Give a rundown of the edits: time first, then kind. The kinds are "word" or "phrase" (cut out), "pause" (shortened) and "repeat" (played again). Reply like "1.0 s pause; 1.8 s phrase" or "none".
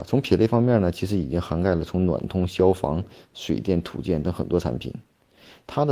none